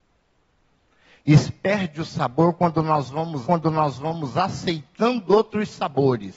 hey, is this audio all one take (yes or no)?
no